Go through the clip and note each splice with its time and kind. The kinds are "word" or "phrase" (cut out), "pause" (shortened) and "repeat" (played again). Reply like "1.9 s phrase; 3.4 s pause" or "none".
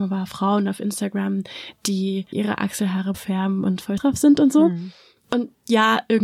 2.3 s word; 3.1 s word; 4.0 s word